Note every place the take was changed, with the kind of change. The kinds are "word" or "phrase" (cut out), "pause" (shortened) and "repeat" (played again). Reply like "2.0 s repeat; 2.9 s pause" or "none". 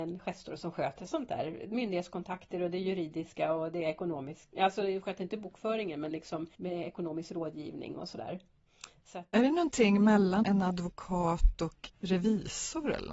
6.5 s pause; 10.4 s word; 11.9 s phrase